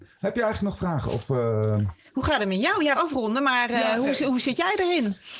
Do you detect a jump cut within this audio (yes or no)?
yes